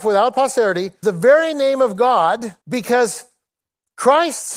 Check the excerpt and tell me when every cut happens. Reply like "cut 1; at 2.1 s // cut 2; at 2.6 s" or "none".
cut 1; at 1.0 s // cut 2; at 2.6 s